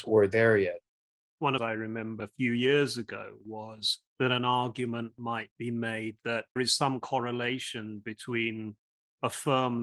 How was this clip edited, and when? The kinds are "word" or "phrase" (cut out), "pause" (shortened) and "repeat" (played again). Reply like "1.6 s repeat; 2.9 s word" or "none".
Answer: 1.6 s phrase; 2.2 s word; 4.1 s pause; 6.6 s word